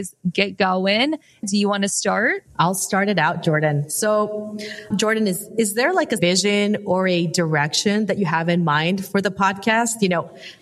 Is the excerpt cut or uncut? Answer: cut